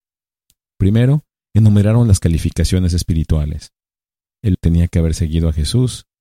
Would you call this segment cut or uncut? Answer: cut